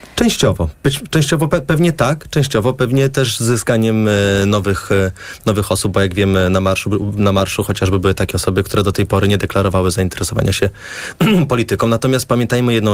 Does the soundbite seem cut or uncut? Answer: uncut